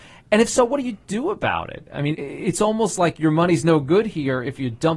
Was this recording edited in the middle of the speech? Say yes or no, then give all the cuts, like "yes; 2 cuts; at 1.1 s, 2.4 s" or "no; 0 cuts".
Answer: yes; 1 cut; at 2.1 s